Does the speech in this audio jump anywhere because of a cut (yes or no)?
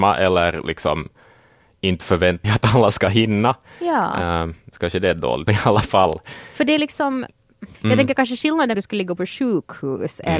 yes